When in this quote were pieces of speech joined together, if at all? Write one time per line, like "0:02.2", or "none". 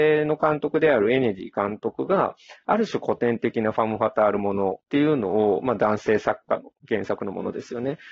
0:04.8